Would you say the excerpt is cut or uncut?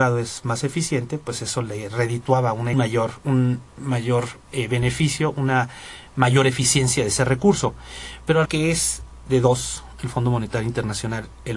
cut